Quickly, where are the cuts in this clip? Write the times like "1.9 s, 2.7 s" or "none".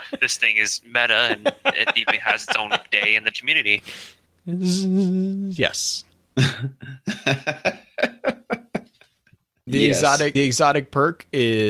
3.3 s, 9.7 s, 10.4 s